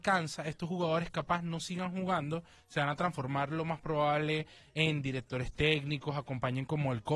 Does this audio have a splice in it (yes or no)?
no